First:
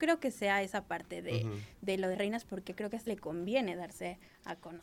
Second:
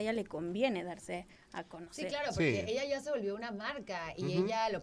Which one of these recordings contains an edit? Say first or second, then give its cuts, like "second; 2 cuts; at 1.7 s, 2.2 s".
first; 2 cuts; at 2.1 s, 3.1 s